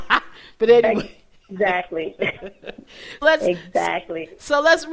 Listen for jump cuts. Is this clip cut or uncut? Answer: cut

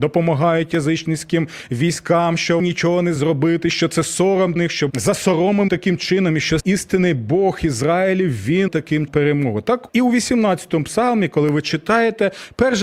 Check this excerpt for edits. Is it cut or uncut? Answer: cut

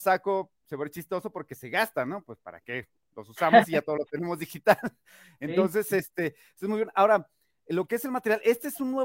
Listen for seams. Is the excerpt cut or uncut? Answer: uncut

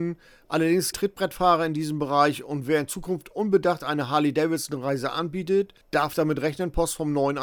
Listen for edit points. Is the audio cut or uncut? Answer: cut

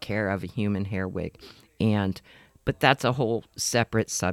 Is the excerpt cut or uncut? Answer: uncut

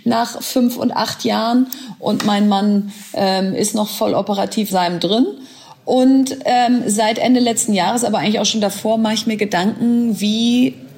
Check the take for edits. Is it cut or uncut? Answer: cut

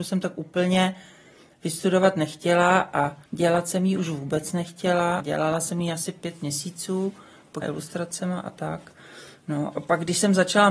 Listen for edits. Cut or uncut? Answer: cut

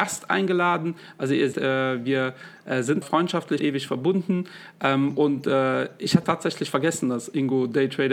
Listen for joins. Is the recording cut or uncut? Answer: cut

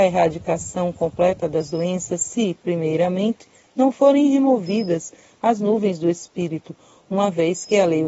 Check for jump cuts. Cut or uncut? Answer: uncut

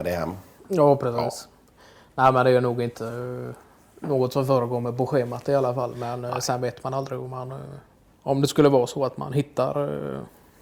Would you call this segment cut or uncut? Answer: uncut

